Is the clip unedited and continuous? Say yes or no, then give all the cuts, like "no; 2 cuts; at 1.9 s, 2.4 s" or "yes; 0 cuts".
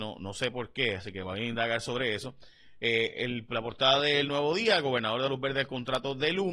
yes; 0 cuts